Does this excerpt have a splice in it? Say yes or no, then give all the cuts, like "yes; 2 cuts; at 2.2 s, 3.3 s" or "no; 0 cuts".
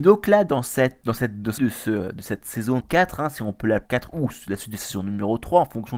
yes; 3 cuts; at 1.6 s, 2.8 s, 3.9 s